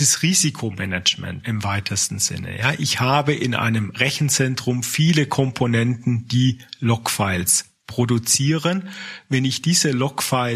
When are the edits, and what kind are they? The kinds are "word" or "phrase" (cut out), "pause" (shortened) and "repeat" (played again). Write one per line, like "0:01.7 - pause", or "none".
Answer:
0:01.4 - word